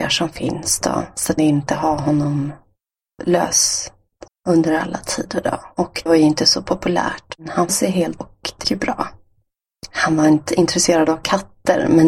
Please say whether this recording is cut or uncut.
cut